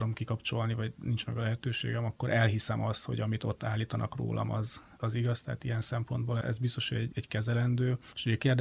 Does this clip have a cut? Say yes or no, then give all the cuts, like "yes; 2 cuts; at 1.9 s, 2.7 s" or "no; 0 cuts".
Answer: yes; 2 cuts; at 6.4 s, 7.1 s